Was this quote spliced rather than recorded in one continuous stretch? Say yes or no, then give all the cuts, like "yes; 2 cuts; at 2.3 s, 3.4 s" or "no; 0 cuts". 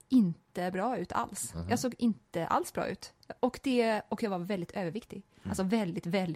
yes; 1 cut; at 3.4 s